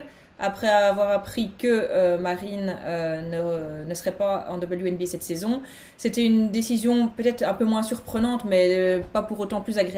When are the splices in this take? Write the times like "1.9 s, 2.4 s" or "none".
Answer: none